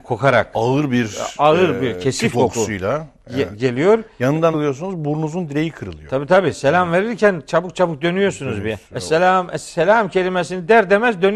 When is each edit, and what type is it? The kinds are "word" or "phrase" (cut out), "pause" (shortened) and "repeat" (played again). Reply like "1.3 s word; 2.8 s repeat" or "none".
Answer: 2.3 s word; 4.5 s word; 8.8 s pause